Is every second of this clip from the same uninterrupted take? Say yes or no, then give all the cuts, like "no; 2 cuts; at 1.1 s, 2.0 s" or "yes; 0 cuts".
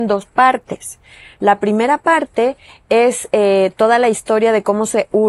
yes; 0 cuts